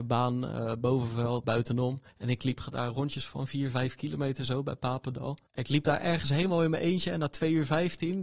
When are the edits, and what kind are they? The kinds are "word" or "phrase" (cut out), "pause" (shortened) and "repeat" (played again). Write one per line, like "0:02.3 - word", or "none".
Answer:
0:01.4 - word
0:02.1 - pause
0:05.5 - pause